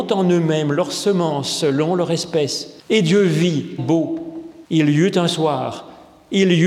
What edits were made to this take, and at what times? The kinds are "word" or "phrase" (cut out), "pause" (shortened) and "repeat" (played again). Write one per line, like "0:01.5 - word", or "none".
0:02.8 - pause
0:03.8 - phrase
0:04.6 - pause